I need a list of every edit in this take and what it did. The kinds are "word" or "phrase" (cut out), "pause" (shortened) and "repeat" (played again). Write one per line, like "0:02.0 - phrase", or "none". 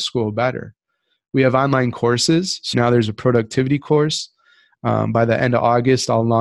0:02.7 - word